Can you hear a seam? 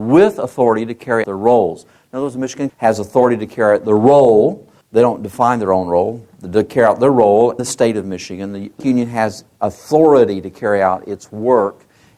yes; 5 cuts; at 1.2 s, 2.7 s, 4.8 s, 7.6 s, 8.8 s

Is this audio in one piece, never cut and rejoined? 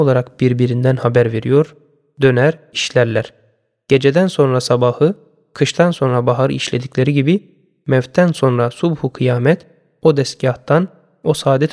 yes; 0 cuts

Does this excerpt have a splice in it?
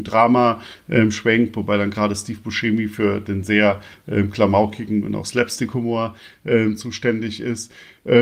no; 0 cuts

